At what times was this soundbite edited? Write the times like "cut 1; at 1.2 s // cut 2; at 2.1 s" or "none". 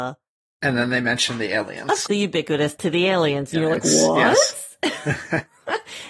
cut 1; at 2.1 s // cut 2; at 2.8 s